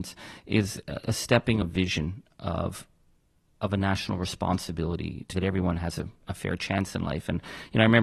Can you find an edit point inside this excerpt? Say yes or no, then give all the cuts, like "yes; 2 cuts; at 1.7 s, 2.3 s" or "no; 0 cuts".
yes; 2 cuts; at 1.6 s, 5.3 s